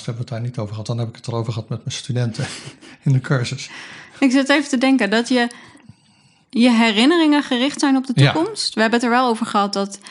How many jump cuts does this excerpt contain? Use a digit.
0